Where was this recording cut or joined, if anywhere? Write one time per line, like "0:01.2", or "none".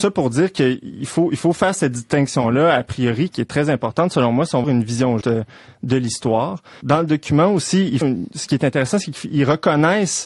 0:03.3
0:04.6
0:05.2
0:06.8
0:08.0